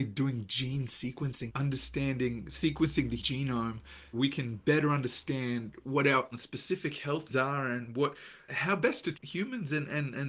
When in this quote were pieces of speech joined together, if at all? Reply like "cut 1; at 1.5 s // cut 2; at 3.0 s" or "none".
cut 1; at 1.5 s // cut 2; at 3.2 s // cut 3; at 4.1 s // cut 4; at 5.8 s // cut 5; at 6.3 s // cut 6; at 7.3 s // cut 7; at 8.5 s // cut 8; at 9.1 s